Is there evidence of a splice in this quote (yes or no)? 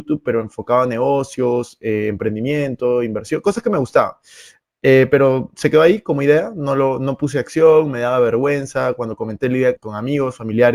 yes